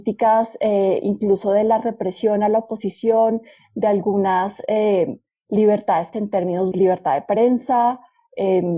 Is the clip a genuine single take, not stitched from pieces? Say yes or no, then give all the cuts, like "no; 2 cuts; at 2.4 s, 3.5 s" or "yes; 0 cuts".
no; 2 cuts; at 6.1 s, 6.7 s